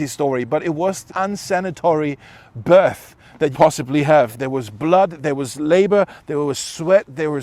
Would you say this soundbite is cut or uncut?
cut